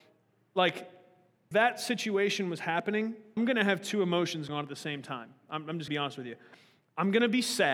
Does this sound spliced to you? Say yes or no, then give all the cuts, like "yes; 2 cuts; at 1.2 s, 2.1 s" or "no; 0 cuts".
yes; 4 cuts; at 1.5 s, 3.4 s, 4.5 s, 5.9 s